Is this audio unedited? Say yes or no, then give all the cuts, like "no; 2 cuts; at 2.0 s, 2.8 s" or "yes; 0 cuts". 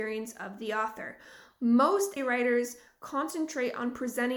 no; 1 cut; at 2.2 s